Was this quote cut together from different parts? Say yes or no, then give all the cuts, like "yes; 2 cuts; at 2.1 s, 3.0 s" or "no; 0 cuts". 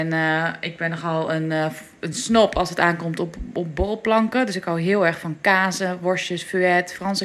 no; 0 cuts